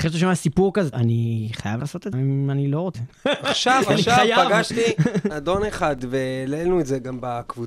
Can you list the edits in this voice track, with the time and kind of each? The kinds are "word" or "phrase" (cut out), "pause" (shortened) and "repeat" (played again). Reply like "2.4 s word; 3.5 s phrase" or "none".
0.9 s word; 1.8 s word; 2.1 s phrase; 2.9 s phrase; 5.3 s word

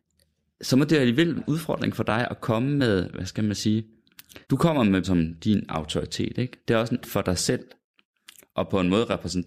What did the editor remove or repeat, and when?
1.4 s word; 4.4 s pause; 5.0 s word; 7.0 s word

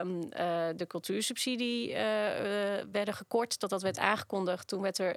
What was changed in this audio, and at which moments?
none

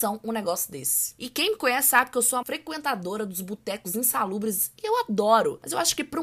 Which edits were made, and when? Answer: 2.4 s word

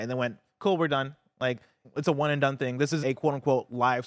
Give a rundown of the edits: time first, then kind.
1.8 s word; 3.0 s word

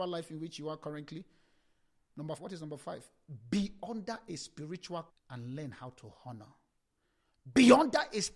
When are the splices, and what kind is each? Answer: 2.4 s word; 5.1 s word

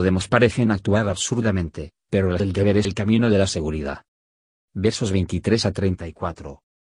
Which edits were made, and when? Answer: 2.4 s word; 2.8 s word

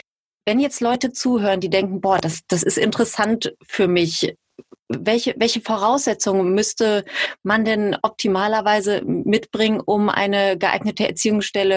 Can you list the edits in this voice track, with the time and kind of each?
none

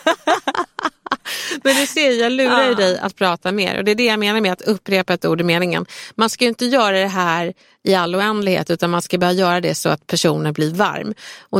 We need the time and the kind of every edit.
none

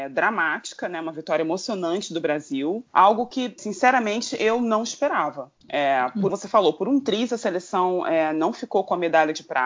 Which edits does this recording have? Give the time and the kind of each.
2.9 s pause; 3.6 s word; 5.6 s pause; 6.3 s phrase

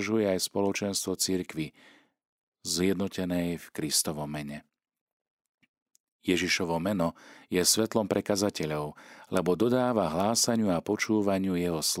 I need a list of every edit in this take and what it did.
none

